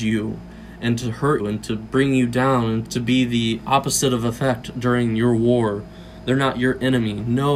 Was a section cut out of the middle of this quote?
yes; 2 cuts; at 1.4 s, 2.8 s

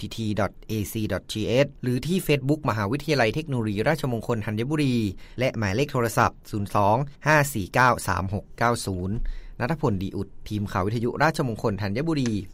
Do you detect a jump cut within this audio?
yes; 1 cut; at 7.2 s

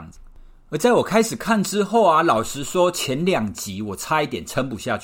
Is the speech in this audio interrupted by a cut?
no; 0 cuts

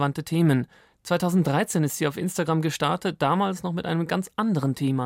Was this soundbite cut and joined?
no; 0 cuts

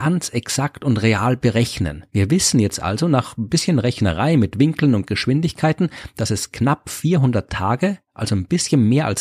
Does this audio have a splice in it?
yes; 1 cut; at 2.1 s

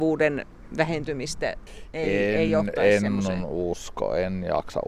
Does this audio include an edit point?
no; 0 cuts

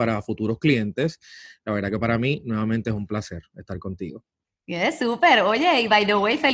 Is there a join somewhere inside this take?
no; 0 cuts

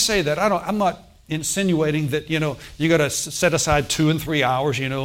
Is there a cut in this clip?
no; 0 cuts

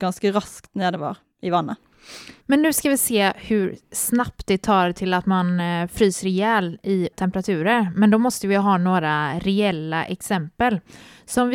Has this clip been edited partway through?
yes; 2 cuts; at 2.4 s, 7.1 s

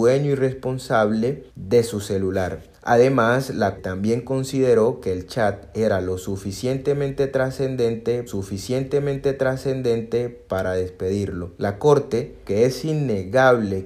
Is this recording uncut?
no; 6 cuts; at 1.5 s, 2.7 s, 3.8 s, 8.3 s, 11.6 s, 12.4 s

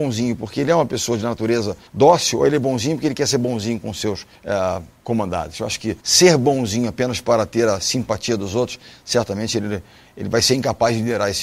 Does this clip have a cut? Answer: yes; 3 cuts; at 1.9 s, 4.3 s, 6.0 s

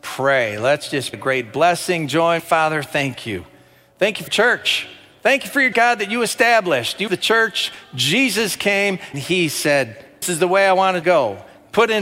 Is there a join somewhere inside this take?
yes; 8 cuts; at 1.1 s, 2.4 s, 4.3 s, 5.7 s, 7.1 s, 9.1 s, 10.2 s, 11.0 s

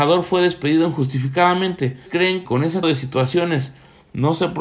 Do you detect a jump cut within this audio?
yes; 3 cuts; at 2.1 s, 2.4 s, 2.8 s

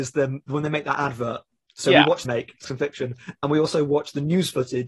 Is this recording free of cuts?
no; 2 cuts; at 2.2 s, 2.6 s

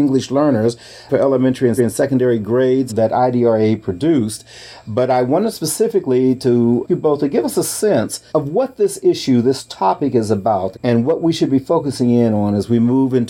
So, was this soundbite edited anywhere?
yes; 6 cuts; at 1.1 s, 1.8 s, 2.9 s, 6.9 s, 8.3 s, 10.7 s

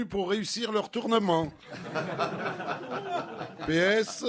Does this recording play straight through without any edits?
yes; 0 cuts

